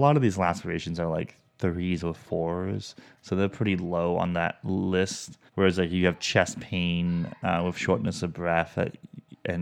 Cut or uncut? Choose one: cut